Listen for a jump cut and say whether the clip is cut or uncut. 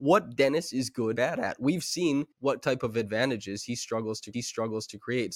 cut